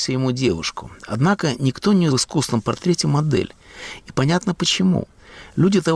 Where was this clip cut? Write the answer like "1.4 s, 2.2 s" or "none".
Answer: 2.1 s